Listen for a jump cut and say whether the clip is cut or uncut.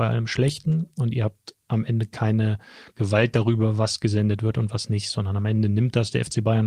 uncut